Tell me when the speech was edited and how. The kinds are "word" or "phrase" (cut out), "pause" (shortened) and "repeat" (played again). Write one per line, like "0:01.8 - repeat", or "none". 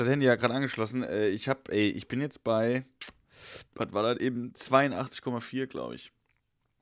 0:03.7 - pause